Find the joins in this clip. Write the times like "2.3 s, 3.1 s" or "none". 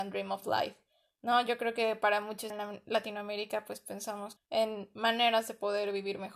2.5 s, 4.4 s